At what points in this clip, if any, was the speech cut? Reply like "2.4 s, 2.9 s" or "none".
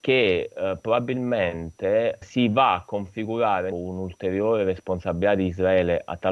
2.2 s, 3.7 s